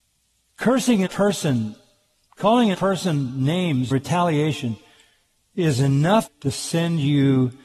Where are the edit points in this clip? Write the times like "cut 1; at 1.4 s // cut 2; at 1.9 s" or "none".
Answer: cut 1; at 1.1 s // cut 2; at 2.7 s // cut 3; at 3.9 s // cut 4; at 6.3 s